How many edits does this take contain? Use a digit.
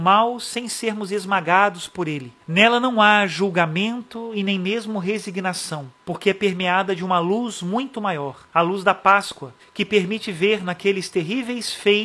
4